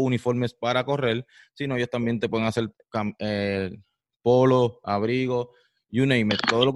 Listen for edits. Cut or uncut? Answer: uncut